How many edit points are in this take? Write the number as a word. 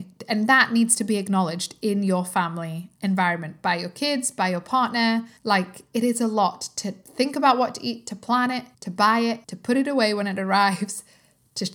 three